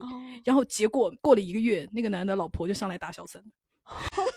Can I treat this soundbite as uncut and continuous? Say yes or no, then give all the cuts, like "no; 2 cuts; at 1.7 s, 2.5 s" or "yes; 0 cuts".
no; 1 cut; at 1.2 s